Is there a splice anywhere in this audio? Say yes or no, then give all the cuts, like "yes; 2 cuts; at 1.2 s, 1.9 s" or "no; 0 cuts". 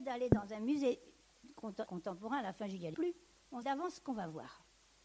yes; 3 cuts; at 1.9 s, 2.9 s, 3.6 s